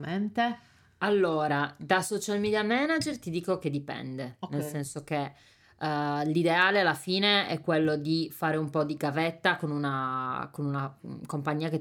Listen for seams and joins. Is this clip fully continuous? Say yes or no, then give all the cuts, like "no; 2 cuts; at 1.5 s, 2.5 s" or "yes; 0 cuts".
yes; 0 cuts